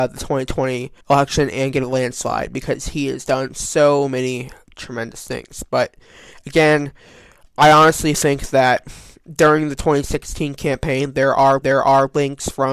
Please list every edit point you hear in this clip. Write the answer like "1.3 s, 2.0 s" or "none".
1.0 s, 11.6 s